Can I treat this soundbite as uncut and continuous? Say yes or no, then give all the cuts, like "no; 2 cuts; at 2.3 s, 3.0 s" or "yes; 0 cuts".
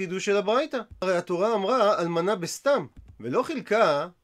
yes; 0 cuts